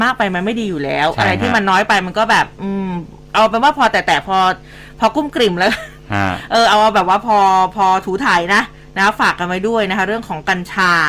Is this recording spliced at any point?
no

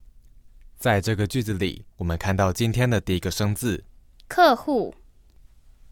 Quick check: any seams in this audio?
yes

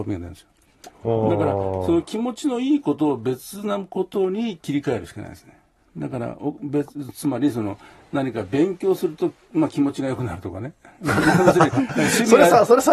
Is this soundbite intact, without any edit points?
yes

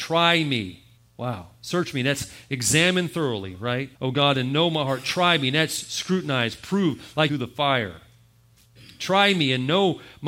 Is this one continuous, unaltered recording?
no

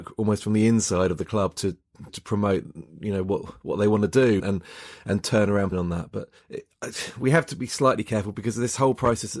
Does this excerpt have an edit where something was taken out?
yes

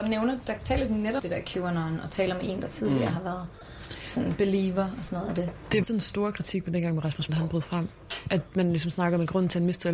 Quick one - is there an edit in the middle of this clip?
yes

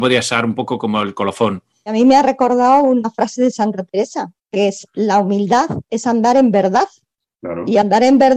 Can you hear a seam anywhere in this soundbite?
yes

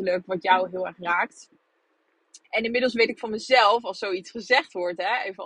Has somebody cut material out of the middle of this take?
yes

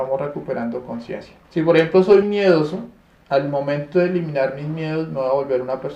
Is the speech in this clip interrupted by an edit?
yes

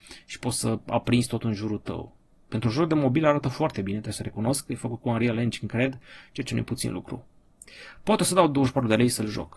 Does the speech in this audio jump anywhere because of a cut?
no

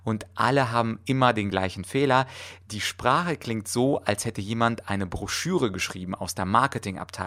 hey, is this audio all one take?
yes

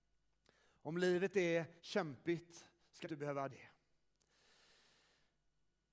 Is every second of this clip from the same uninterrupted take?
no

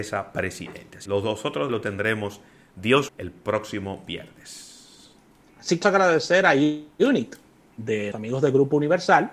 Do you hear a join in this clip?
yes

